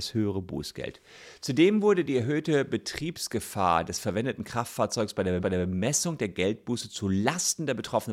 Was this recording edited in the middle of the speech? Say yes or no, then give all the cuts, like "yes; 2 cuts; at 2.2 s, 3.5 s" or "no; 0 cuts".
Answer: yes; 1 cut; at 5.4 s